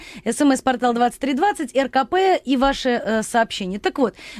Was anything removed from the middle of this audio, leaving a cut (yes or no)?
no